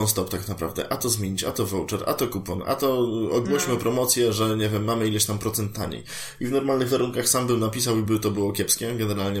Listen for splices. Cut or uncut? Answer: uncut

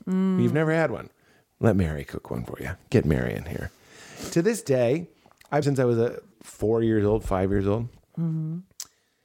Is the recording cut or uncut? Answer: cut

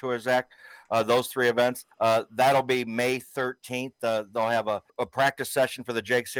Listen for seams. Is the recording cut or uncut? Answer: cut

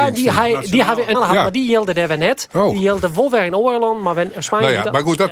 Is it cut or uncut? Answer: cut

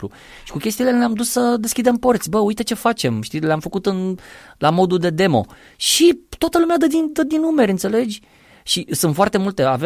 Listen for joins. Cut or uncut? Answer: uncut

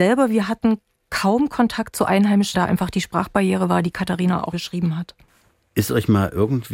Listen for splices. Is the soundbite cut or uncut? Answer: cut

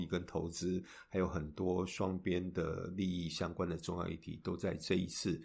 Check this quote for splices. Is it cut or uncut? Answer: uncut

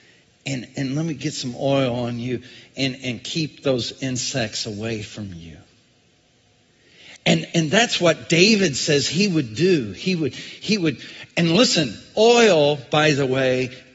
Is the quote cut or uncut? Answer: uncut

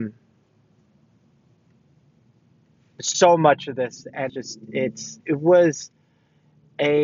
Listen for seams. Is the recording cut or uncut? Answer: cut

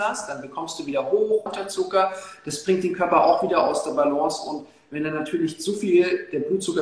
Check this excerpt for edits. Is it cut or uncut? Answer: cut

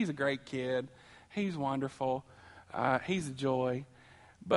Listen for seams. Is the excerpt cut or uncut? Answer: uncut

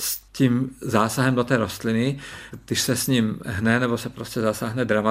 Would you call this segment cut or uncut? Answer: uncut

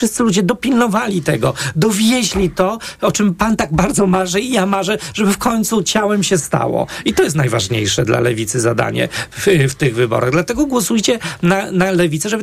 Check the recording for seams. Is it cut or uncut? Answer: uncut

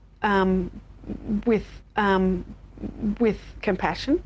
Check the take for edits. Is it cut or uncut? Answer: cut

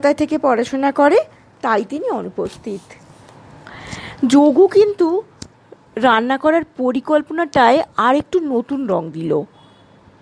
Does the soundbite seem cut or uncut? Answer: uncut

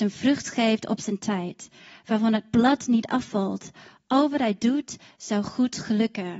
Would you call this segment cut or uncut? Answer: uncut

